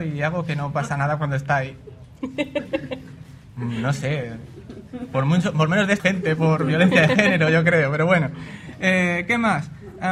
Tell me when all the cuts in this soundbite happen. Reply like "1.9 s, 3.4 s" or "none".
6.0 s